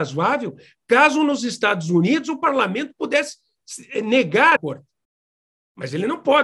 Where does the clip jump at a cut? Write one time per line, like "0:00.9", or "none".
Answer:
0:04.6